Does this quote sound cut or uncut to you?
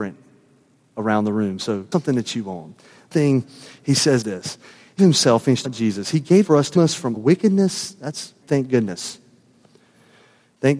cut